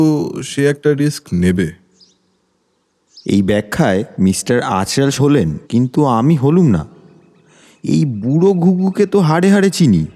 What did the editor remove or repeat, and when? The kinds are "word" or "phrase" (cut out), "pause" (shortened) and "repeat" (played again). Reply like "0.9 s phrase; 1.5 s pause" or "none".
4.1 s pause; 5.2 s word; 5.6 s pause